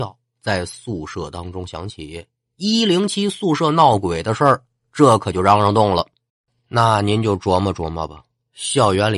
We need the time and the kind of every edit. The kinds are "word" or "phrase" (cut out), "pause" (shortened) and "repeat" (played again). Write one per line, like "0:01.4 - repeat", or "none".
none